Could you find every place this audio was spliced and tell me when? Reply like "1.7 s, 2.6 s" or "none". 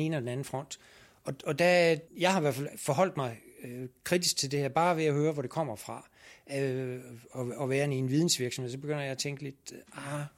2.1 s